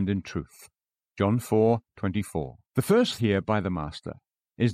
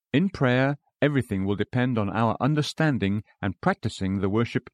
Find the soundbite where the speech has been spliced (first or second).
first